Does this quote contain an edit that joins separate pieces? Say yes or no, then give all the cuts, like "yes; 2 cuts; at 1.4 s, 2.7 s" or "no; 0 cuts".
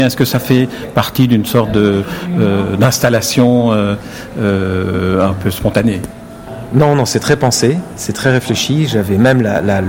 no; 0 cuts